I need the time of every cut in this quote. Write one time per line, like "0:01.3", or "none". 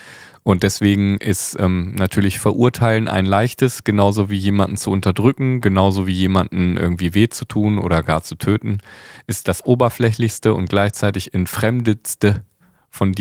none